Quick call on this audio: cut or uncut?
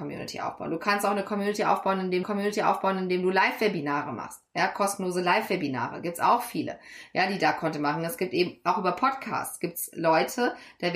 cut